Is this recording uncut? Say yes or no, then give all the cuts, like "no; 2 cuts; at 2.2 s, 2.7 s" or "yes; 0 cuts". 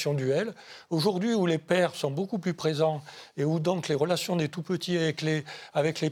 yes; 0 cuts